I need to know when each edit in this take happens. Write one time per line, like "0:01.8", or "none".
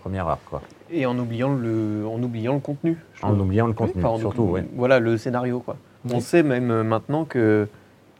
none